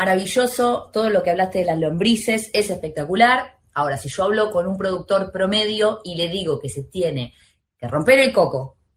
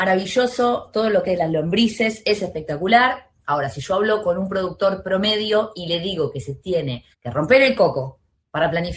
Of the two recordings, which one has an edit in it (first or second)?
second